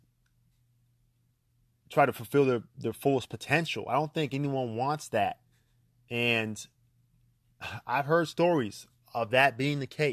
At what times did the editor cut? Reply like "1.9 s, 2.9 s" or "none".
none